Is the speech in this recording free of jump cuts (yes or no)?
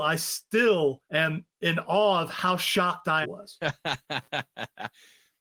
no